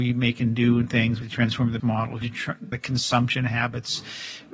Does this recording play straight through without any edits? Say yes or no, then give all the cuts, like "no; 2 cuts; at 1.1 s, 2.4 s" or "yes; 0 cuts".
no; 4 cuts; at 1.2 s, 1.8 s, 2.2 s, 2.7 s